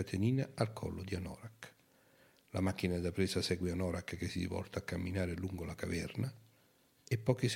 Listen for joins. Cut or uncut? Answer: uncut